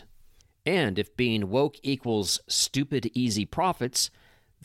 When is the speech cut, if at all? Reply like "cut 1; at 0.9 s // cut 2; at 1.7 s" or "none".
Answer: none